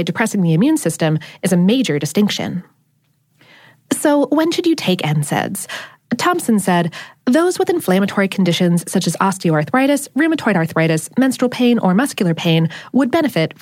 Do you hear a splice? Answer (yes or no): no